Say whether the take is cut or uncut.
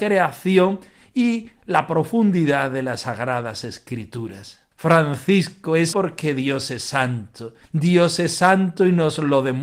cut